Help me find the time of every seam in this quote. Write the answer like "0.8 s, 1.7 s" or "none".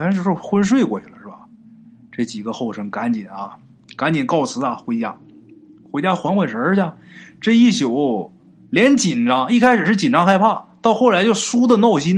none